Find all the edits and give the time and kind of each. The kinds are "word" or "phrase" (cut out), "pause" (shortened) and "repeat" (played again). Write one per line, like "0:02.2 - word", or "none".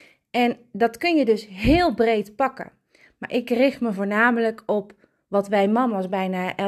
none

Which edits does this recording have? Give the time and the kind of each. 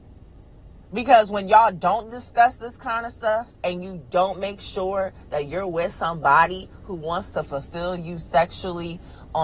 0:03.5 - pause

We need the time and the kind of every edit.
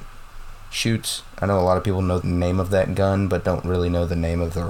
0:02.2 - word

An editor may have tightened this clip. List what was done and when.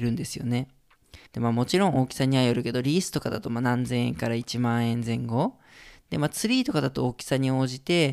0:01.3 - pause

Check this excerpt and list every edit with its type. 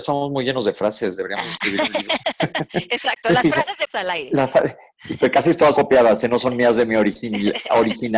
0:03.9 - word
0:05.7 - word

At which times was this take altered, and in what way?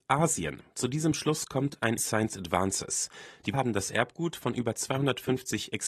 0:02.0 - phrase
0:03.5 - word

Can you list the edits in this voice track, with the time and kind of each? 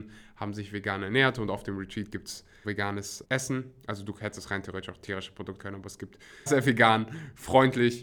0:02.6 - word
0:03.2 - word
0:05.6 - word
0:06.5 - word

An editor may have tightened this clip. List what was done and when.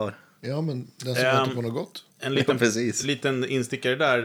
none

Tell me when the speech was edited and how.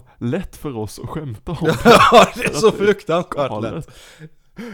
none

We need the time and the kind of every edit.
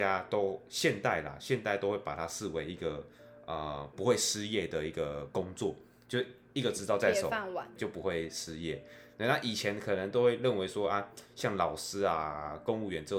0:07.8 - word

